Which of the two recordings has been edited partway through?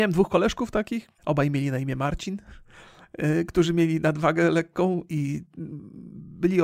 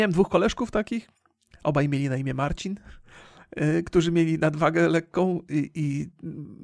first; 2 cuts; at 1.2 s, 5.1 s

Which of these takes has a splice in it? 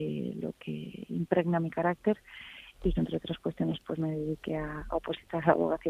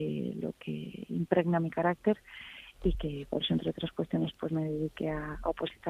first; 1 cut; at 2.9 s

